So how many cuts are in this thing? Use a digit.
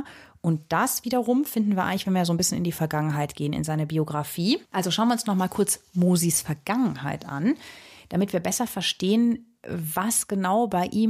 1